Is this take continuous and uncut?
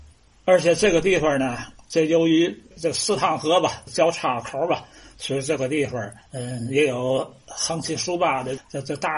yes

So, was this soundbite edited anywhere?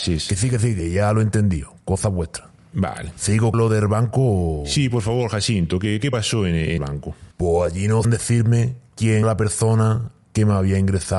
yes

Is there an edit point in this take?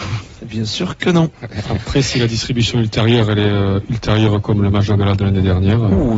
no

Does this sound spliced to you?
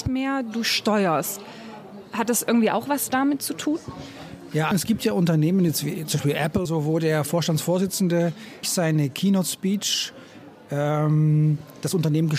yes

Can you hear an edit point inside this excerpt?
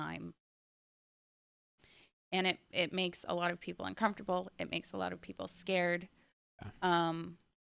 no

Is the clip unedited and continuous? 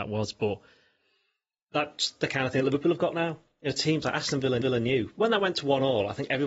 no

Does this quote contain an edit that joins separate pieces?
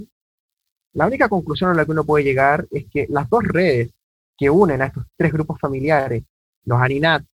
no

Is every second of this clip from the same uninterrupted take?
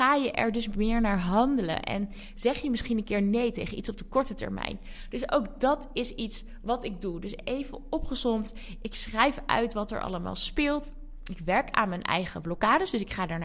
yes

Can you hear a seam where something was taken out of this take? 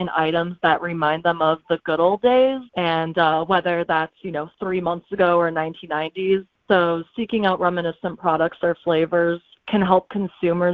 yes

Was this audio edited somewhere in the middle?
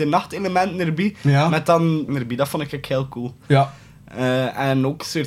yes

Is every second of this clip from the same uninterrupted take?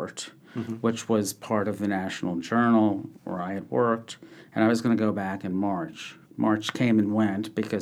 no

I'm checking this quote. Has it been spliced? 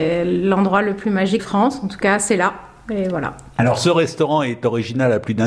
yes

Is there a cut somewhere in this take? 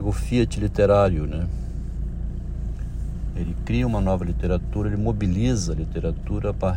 no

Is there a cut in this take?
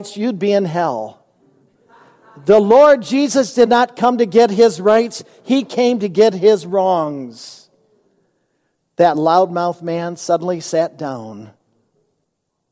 no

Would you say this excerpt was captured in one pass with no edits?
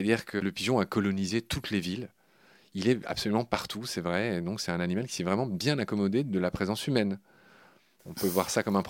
yes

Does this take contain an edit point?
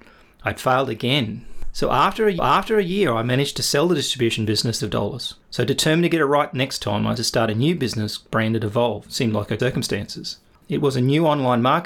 yes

